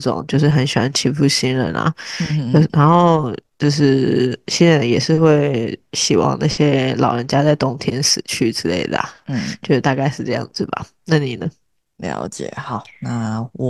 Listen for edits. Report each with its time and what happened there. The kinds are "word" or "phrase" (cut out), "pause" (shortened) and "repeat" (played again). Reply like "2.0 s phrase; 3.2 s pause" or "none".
none